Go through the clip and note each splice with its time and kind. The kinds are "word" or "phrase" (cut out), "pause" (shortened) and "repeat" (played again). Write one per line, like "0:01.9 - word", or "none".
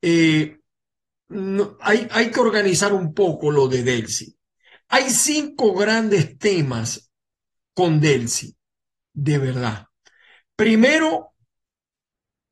0:02.1 - word